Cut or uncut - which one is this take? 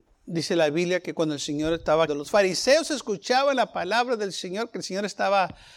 cut